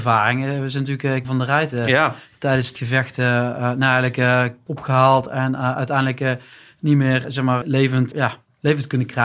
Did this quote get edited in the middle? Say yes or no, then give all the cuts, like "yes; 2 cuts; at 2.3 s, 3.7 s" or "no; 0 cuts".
yes; 6 cuts; at 1.2 s, 2.8 s, 4.7 s, 7.2 s, 7.6 s, 8.1 s